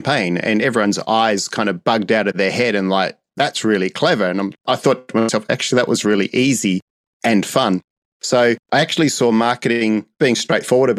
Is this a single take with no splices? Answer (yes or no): no